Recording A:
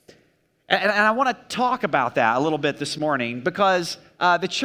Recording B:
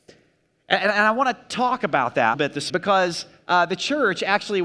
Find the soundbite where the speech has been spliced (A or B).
B